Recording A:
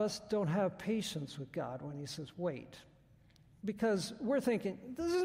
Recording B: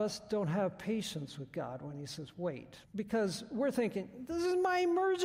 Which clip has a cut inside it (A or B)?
B